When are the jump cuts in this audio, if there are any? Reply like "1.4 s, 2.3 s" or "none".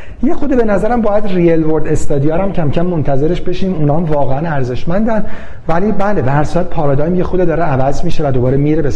none